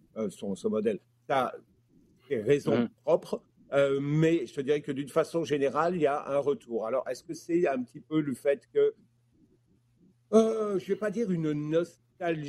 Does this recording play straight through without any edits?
no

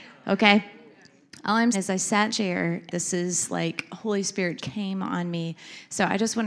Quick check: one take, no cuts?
no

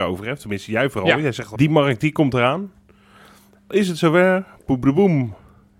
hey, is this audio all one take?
no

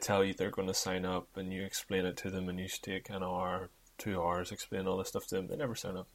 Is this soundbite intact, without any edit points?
yes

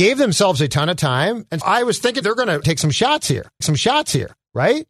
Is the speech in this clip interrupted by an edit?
yes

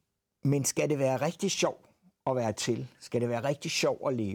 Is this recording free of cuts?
yes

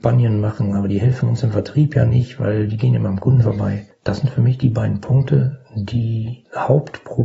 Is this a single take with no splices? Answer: yes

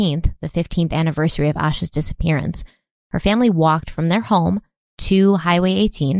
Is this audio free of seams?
yes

